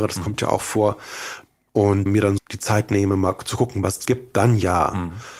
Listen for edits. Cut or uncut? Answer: cut